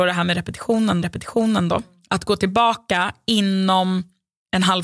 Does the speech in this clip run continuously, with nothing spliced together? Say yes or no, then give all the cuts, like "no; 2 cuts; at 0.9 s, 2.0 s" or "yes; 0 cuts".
no; 1 cut; at 1.0 s